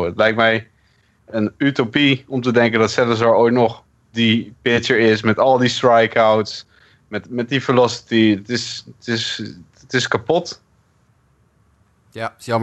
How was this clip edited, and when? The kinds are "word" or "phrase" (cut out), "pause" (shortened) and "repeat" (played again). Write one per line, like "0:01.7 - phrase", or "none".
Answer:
none

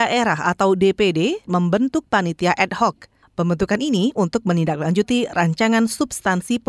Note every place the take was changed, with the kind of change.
0:01.4 - word

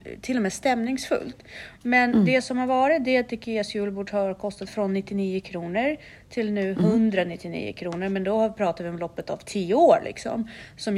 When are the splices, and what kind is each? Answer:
none

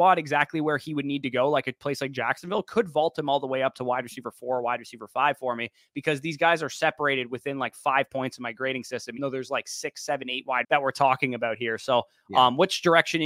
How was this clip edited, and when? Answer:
0:09.2 - word
0:10.6 - word

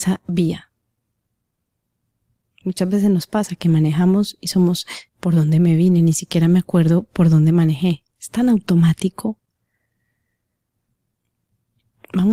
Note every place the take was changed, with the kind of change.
0:05.1 - pause

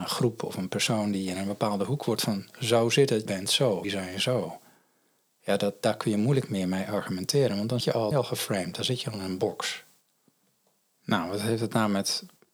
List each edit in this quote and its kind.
0:02.2 - word
0:03.3 - word
0:03.8 - word
0:07.8 - word
0:08.1 - word

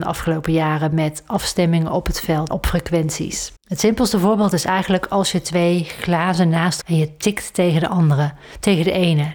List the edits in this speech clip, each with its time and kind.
0:02.5 - word
0:03.6 - pause
0:06.8 - phrase

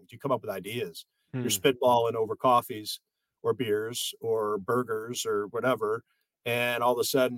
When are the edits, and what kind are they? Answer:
none

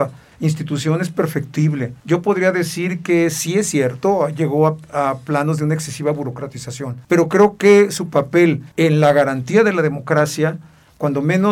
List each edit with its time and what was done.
0:02.0 - pause
0:07.0 - pause
0:08.7 - pause

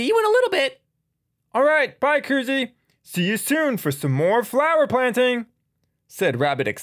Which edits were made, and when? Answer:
none

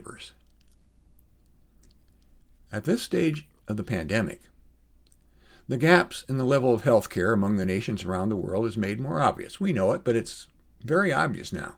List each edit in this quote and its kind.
none

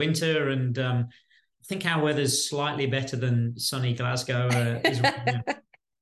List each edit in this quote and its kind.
none

